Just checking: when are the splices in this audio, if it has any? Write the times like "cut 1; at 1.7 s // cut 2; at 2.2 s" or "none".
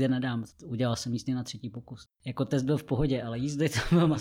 none